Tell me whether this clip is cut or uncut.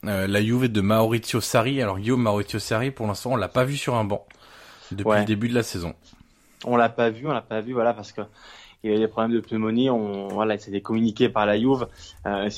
uncut